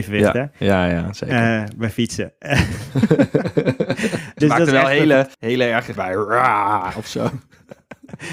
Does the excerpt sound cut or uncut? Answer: cut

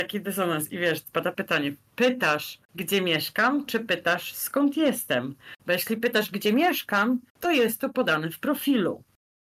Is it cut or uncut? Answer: cut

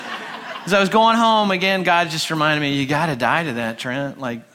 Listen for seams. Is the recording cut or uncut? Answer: uncut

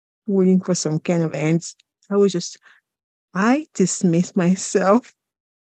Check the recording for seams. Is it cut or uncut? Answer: uncut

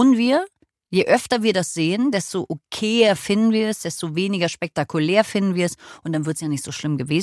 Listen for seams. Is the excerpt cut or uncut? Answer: uncut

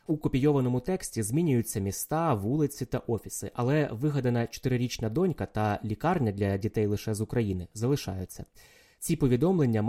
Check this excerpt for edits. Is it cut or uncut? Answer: uncut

